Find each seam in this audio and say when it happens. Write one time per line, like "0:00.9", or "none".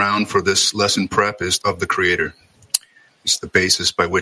0:01.6
0:03.1